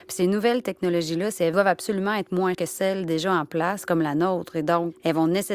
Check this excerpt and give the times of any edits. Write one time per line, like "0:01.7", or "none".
0:01.5
0:02.5